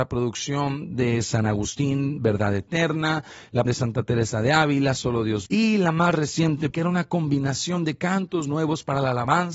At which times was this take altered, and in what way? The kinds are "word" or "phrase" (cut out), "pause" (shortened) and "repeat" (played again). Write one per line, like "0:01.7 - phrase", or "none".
0:03.7 - word
0:05.5 - word
0:06.7 - word